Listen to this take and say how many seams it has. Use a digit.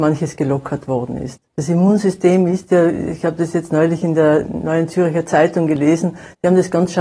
1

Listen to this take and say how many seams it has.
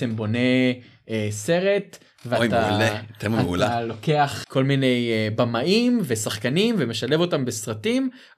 1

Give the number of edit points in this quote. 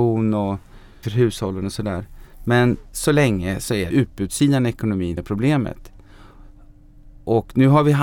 4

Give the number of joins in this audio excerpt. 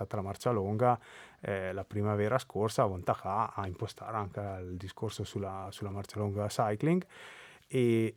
0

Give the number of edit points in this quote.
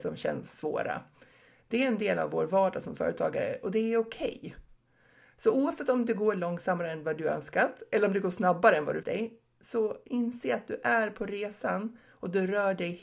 1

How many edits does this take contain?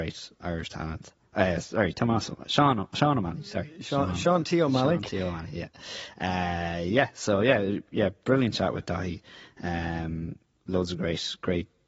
0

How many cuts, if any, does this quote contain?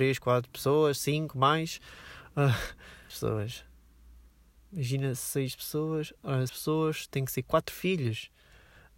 2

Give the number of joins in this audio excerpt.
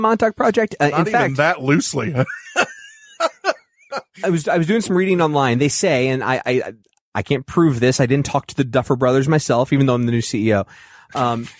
1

